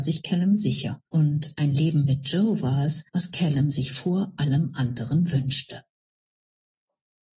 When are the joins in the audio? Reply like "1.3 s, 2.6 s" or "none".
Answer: 1.1 s, 3.1 s

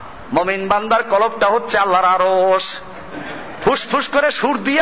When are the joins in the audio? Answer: none

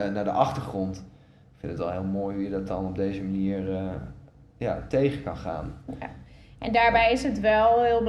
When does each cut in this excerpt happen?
none

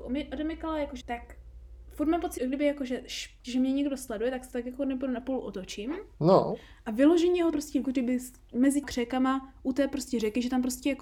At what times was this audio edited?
1.0 s, 2.4 s, 3.4 s, 6.1 s, 7.5 s, 7.8 s, 8.8 s

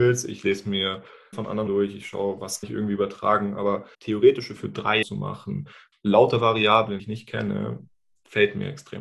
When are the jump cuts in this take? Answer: 1.3 s, 1.7 s, 2.6 s, 3.9 s, 4.6 s, 5.0 s, 5.9 s, 7.0 s

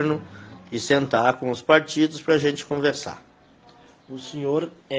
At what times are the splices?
none

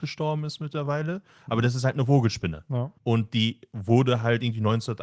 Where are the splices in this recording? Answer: 3.0 s

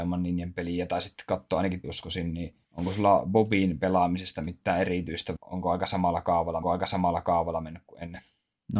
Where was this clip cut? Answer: 1.8 s, 2.6 s, 5.4 s, 6.6 s

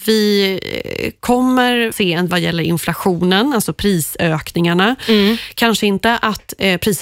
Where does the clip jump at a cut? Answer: 1.9 s, 2.3 s

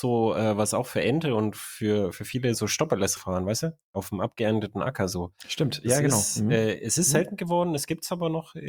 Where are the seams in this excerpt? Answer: 2.5 s, 3.2 s

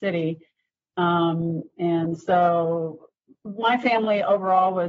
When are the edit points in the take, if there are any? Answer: 3.2 s

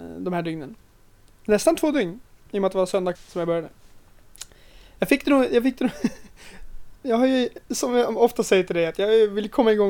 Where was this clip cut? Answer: 3.1 s, 6.9 s

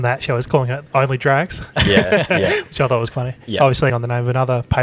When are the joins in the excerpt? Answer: 3.1 s, 3.9 s

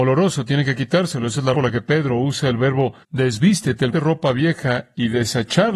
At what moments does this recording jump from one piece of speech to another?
1.5 s, 3.0 s, 3.9 s

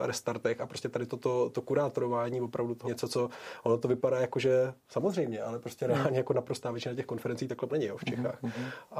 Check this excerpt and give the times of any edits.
2.8 s, 7.7 s

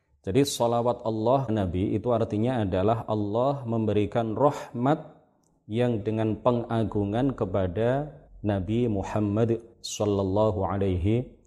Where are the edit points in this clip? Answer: 1.5 s, 6.0 s, 8.3 s, 9.7 s

